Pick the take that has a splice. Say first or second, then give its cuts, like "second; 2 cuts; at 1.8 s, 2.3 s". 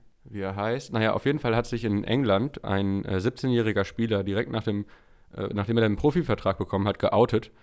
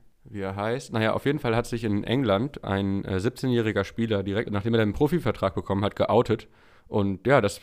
second; 1 cut; at 4.4 s